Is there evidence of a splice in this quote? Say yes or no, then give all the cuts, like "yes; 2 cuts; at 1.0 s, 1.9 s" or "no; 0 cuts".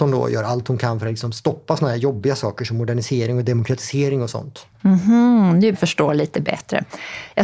yes; 1 cut; at 5.7 s